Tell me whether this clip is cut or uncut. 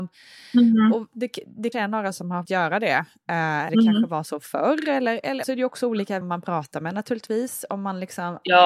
cut